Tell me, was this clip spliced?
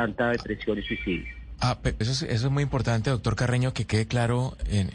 yes; 1 cut; at 2.0 s

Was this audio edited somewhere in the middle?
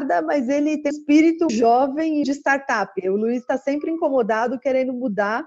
yes; 3 cuts; at 0.9 s, 1.5 s, 2.2 s

